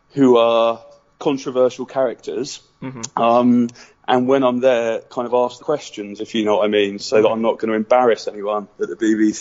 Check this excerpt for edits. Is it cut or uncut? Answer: cut